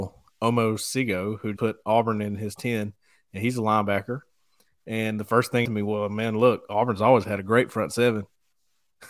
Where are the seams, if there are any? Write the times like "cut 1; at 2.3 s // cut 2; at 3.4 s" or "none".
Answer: cut 1; at 1.6 s // cut 2; at 2.6 s // cut 3; at 5.6 s